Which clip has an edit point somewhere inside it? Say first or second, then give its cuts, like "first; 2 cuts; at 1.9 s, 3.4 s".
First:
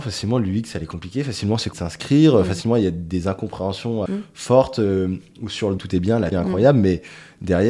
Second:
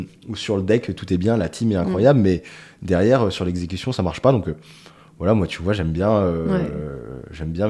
first; 4 cuts; at 1.7 s, 4.1 s, 5.8 s, 6.3 s